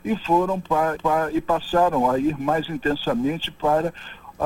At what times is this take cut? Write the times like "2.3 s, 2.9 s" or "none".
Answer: 1.0 s